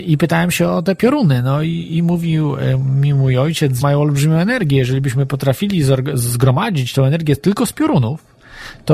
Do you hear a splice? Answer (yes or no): yes